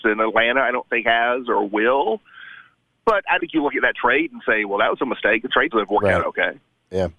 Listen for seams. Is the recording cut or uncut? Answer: cut